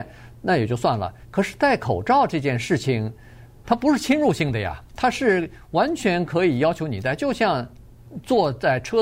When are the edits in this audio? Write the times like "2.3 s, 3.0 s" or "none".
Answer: 1.2 s